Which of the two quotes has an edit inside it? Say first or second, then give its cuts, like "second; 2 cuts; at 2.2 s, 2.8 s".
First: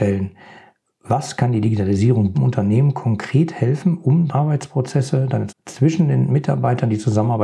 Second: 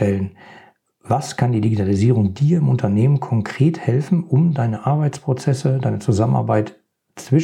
first; 3 cuts; at 2.3 s, 4.3 s, 5.5 s